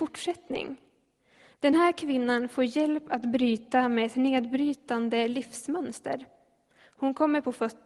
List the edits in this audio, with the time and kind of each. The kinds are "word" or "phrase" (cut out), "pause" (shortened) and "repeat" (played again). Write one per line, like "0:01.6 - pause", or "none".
none

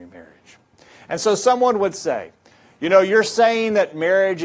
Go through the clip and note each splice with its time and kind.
none

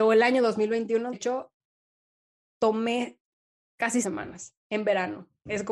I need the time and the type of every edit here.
0:01.1 - word
0:04.0 - word

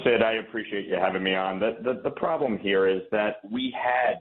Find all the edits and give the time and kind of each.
none

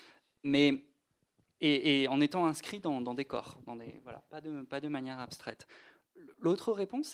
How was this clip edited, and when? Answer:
none

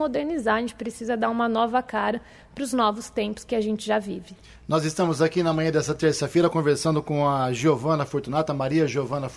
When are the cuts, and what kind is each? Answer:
none

